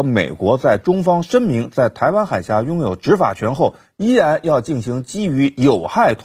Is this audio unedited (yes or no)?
yes